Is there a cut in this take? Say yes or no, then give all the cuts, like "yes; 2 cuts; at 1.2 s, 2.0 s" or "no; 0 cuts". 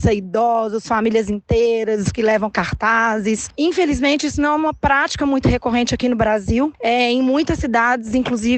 no; 0 cuts